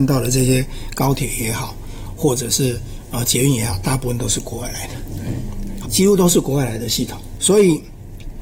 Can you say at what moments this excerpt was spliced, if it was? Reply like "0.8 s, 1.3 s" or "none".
5.8 s

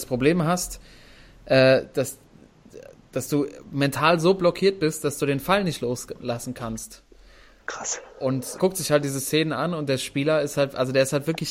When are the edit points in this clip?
8.6 s

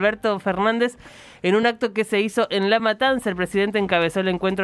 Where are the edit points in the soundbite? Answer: none

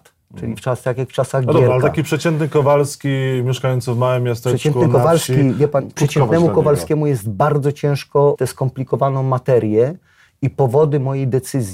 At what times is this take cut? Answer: 6.0 s, 8.4 s

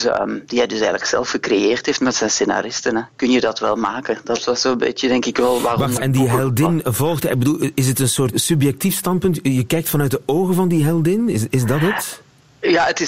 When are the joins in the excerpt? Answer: 6.0 s, 8.3 s

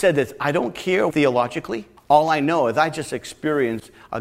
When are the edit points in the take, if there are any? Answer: 1.1 s, 2.0 s

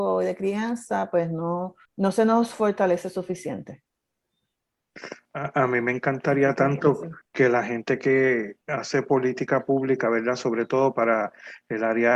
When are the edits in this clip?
1.9 s, 7.2 s, 8.6 s

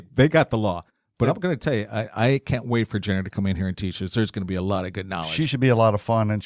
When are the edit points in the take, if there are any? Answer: none

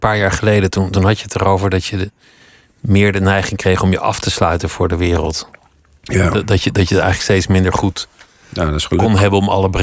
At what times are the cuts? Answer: none

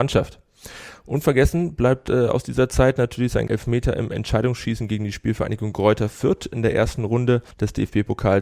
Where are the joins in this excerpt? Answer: 3.5 s, 7.5 s

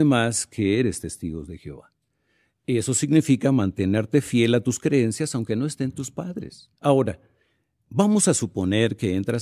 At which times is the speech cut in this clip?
6.8 s

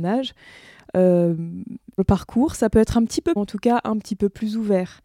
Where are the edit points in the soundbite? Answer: 2.0 s, 3.4 s

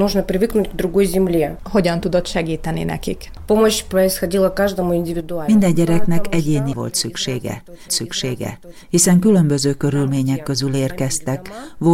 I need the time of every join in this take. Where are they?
6.7 s, 7.9 s

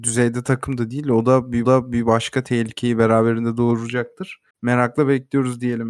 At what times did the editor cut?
1.6 s, 4.5 s

